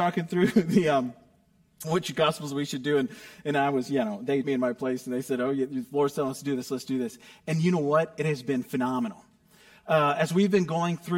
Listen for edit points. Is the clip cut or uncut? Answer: cut